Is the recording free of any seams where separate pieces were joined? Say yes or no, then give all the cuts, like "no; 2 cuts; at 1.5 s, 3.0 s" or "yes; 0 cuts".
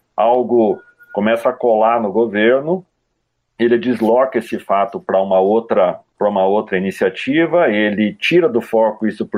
yes; 0 cuts